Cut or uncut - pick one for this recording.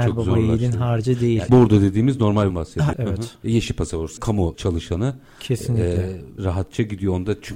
cut